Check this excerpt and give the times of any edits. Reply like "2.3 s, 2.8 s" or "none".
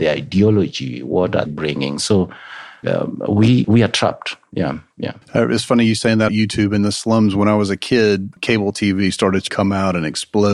1.5 s, 2.8 s, 3.6 s, 5.2 s, 6.3 s, 8.4 s, 9.5 s